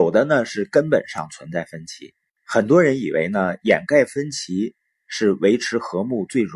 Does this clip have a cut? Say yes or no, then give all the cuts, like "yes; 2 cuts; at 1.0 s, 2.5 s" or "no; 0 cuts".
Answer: no; 0 cuts